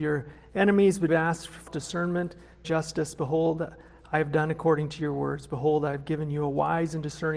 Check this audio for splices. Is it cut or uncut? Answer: cut